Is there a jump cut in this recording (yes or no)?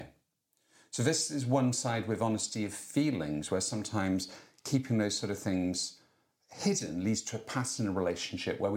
no